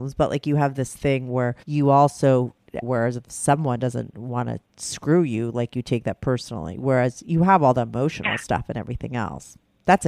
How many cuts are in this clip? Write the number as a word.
two